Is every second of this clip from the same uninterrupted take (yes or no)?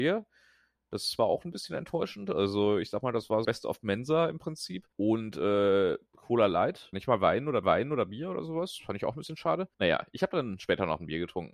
no